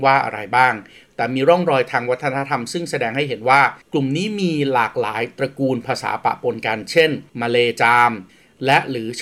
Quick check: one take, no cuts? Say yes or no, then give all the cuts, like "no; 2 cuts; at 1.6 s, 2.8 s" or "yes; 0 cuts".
no; 2 cuts; at 3.8 s, 7.3 s